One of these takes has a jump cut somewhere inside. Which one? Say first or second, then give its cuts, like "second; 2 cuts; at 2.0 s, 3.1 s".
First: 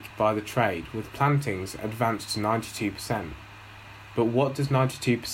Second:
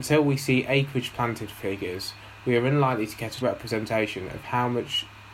second; 1 cut; at 3.4 s